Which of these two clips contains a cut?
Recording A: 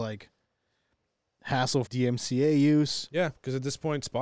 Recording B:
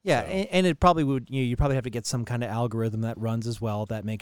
A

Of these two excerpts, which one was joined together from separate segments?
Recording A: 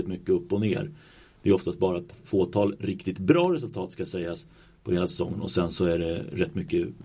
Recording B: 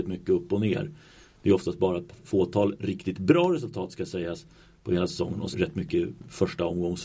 B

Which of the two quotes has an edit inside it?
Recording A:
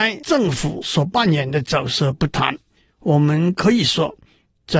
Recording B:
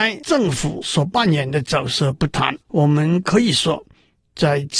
B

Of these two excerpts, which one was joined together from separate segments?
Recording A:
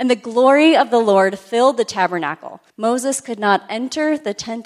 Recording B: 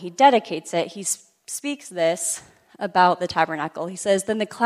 A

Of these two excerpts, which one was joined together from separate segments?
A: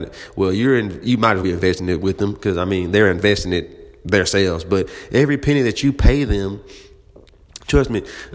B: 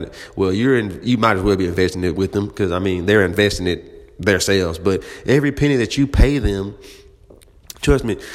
A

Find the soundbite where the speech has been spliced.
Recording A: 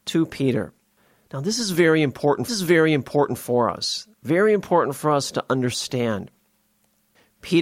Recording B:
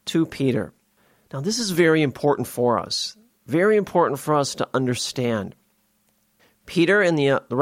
A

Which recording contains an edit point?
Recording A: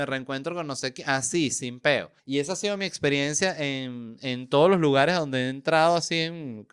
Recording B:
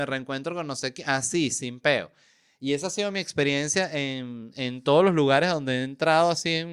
A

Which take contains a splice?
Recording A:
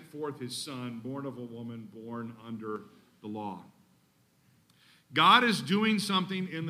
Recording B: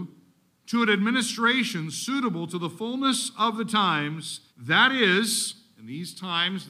B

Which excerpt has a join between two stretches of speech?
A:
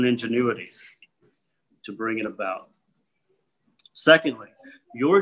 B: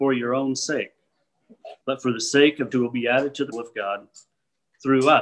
B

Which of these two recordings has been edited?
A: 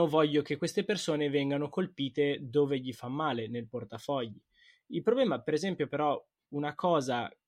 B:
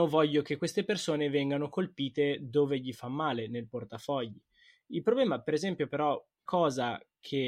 B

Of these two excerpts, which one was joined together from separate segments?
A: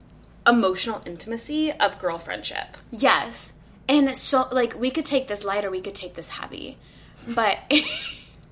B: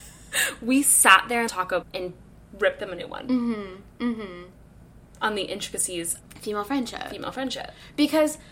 B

